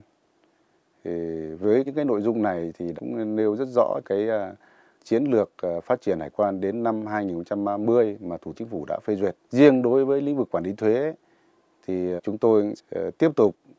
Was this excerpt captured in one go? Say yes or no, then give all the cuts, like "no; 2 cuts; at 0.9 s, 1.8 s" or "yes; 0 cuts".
no; 8 cuts; at 1.9 s, 3.0 s, 4.0 s, 5.0 s, 8.5 s, 9.4 s, 12.2 s, 12.8 s